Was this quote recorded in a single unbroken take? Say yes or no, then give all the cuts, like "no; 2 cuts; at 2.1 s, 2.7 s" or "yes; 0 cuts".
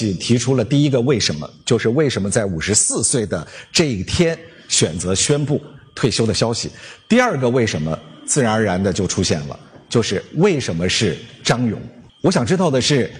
no; 1 cut; at 12.1 s